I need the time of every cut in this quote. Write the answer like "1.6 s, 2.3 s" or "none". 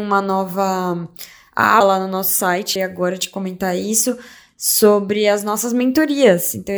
1.8 s, 2.8 s